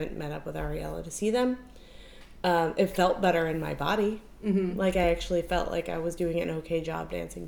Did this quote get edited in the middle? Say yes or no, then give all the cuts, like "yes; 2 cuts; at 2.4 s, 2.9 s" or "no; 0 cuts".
no; 0 cuts